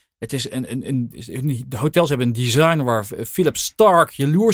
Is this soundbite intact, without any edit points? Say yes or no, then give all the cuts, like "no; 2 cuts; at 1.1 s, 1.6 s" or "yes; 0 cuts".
yes; 0 cuts